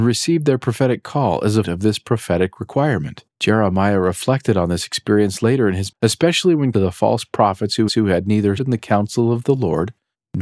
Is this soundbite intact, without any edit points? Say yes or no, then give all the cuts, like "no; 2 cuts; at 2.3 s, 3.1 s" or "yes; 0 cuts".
no; 6 cuts; at 1.6 s, 3.3 s, 5.9 s, 6.7 s, 7.9 s, 8.6 s